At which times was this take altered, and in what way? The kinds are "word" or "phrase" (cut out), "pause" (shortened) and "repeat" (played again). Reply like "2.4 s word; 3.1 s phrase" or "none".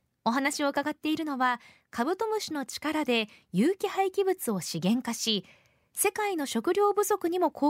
none